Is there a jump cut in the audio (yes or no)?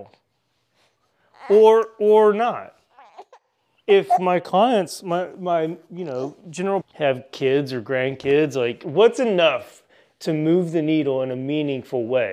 yes